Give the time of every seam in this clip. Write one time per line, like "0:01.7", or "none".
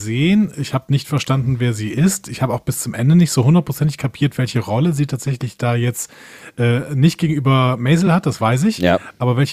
none